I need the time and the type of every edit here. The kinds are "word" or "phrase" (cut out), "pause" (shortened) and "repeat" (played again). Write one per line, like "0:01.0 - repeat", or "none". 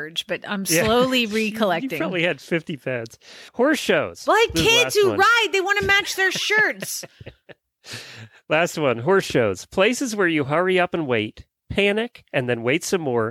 0:03.5 - pause